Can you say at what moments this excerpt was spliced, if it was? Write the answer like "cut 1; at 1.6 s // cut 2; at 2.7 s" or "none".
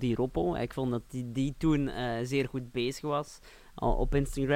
none